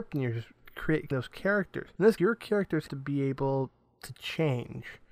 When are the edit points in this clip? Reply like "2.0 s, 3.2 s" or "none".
1.1 s, 2.2 s, 2.9 s